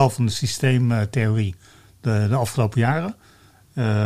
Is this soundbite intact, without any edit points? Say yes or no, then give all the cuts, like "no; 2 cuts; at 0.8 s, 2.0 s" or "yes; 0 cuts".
yes; 0 cuts